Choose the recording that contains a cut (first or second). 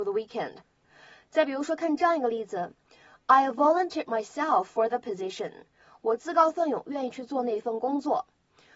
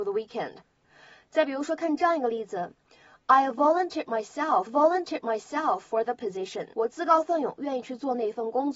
second